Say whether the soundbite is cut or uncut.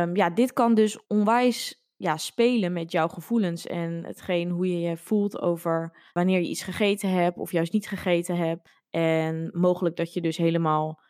cut